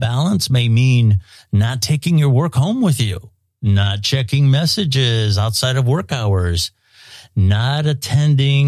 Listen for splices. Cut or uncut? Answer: uncut